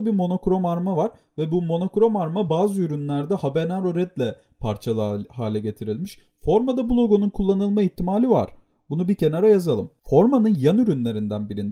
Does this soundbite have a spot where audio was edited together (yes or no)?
no